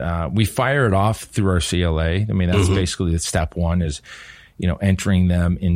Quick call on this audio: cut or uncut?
uncut